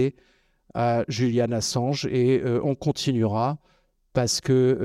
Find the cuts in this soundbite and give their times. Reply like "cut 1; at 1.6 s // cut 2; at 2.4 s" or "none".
none